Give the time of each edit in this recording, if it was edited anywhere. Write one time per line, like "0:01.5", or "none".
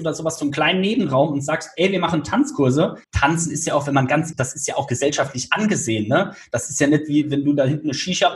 0:03.0
0:04.3

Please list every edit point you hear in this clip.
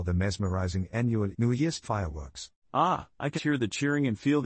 0:01.3
0:01.8
0:03.4

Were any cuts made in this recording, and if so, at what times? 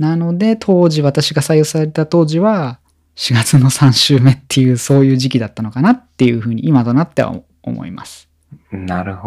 none

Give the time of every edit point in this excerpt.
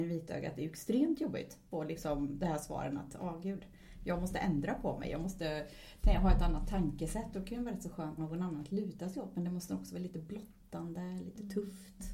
0:08.2

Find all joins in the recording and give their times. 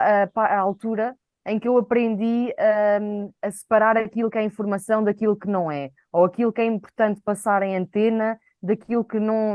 none

